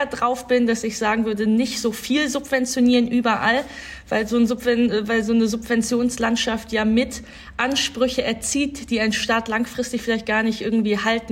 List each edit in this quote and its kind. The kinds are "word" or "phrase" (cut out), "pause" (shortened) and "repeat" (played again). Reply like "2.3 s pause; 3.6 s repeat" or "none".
none